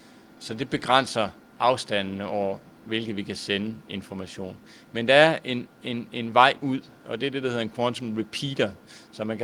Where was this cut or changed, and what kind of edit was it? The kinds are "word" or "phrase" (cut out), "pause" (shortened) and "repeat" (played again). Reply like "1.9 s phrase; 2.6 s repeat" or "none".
1.5 s pause